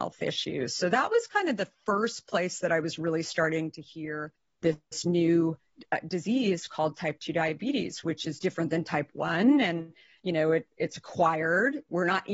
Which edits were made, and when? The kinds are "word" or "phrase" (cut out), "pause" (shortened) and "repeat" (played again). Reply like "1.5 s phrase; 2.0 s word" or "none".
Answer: none